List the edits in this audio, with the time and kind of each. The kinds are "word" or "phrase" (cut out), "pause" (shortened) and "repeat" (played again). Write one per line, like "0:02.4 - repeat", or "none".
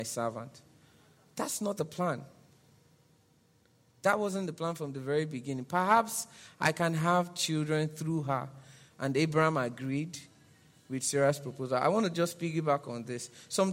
none